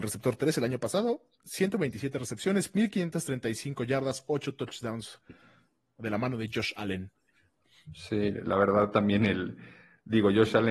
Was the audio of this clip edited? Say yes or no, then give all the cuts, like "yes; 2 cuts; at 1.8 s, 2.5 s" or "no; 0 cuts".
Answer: no; 0 cuts